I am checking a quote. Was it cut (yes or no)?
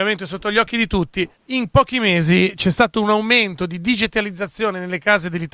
yes